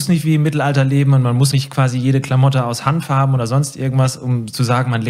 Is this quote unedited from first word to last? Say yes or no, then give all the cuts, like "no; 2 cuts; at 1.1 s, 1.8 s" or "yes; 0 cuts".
no; 1 cut; at 1.5 s